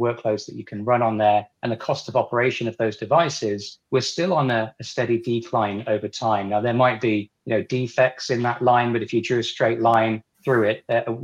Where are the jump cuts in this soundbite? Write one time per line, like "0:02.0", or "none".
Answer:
0:01.5
0:03.8
0:07.4
0:10.3